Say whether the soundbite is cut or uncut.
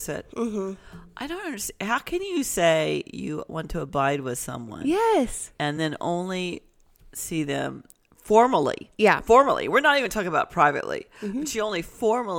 uncut